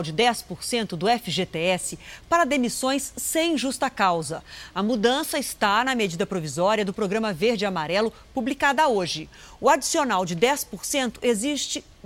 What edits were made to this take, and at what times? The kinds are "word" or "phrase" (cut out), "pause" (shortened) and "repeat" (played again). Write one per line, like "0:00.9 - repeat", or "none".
none